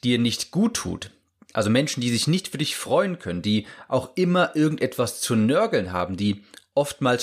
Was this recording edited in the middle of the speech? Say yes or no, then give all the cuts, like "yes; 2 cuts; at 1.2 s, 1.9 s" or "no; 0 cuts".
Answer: no; 0 cuts